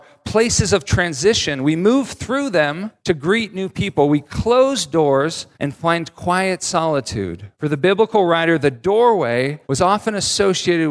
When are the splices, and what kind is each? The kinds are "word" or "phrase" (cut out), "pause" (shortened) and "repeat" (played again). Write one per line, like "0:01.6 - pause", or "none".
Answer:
0:03.0 - pause
0:05.5 - pause
0:07.5 - pause
0:09.6 - pause